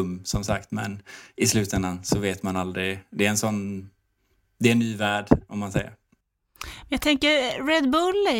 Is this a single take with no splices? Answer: yes; 0 cuts

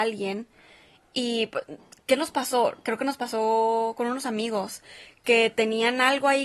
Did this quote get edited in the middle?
no; 0 cuts

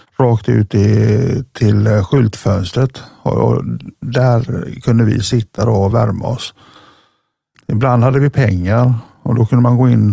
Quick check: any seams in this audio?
no; 0 cuts

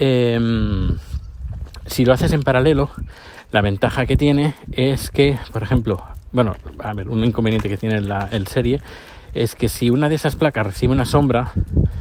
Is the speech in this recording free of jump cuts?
yes; 0 cuts

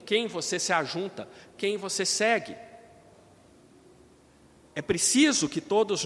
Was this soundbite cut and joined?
no; 0 cuts

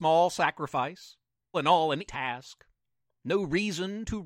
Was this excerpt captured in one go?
no; 2 cuts; at 1.5 s, 2.1 s

